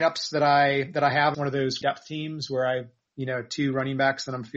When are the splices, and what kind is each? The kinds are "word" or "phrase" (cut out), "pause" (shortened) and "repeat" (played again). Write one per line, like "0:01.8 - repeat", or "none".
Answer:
0:01.3 - phrase
0:01.8 - word
0:03.1 - word